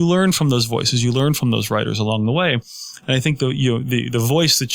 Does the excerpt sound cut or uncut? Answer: uncut